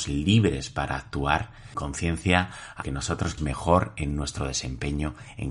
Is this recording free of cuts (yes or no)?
no